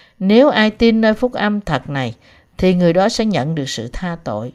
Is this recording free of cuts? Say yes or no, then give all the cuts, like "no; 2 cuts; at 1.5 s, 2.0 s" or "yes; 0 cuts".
yes; 0 cuts